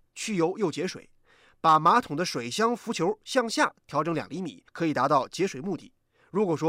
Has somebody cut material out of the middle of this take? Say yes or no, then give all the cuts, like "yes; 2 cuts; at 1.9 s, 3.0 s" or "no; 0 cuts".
yes; 1 cut; at 4.7 s